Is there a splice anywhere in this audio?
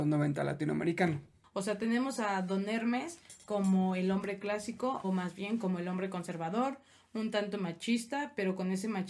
yes; 1 cut; at 5.0 s

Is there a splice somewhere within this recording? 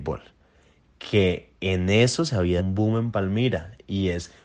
yes; 1 cut; at 2.6 s

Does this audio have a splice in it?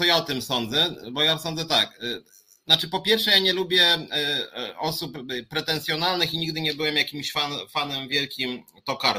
no; 0 cuts

